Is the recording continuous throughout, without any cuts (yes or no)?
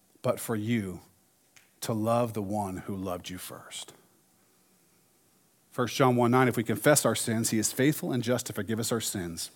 yes